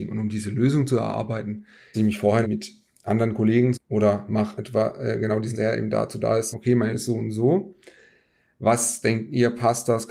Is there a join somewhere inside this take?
yes; 7 cuts; at 1.9 s, 2.4 s, 3.7 s, 4.6 s, 5.5 s, 6.5 s, 6.9 s

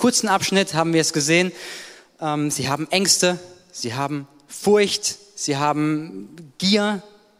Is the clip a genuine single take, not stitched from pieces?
yes; 0 cuts

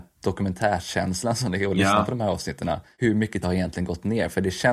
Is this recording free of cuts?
no; 1 cut; at 3.4 s

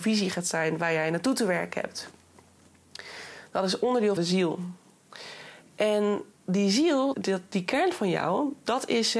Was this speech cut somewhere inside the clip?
yes; 3 cuts; at 4.2 s, 6.3 s, 7.1 s

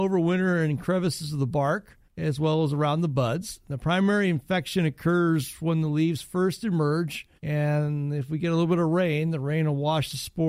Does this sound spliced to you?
yes; 2 cuts; at 2.1 s, 7.4 s

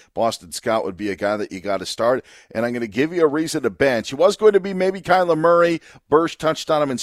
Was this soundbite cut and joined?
no; 0 cuts

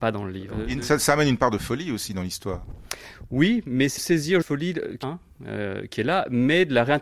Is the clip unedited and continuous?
no; 3 cuts; at 4.0 s, 4.4 s, 5.0 s

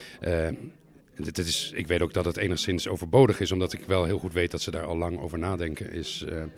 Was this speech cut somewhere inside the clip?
yes; 1 cut; at 1.0 s

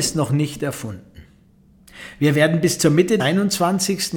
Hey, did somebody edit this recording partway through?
yes; 1 cut; at 3.2 s

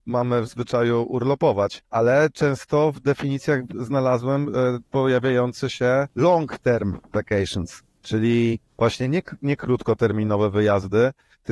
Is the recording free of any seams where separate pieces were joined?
no; 2 cuts; at 1.8 s, 8.7 s

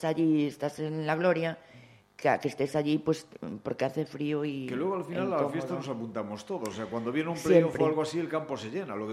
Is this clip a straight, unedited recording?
yes; 0 cuts

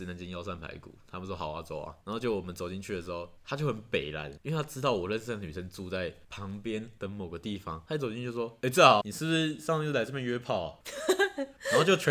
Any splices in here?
yes; 1 cut; at 9.0 s

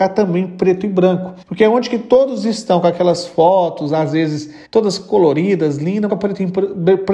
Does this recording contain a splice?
yes; 3 cuts; at 1.4 s, 4.6 s, 6.1 s

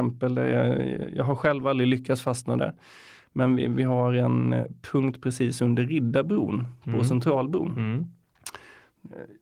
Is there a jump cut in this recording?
no; 0 cuts

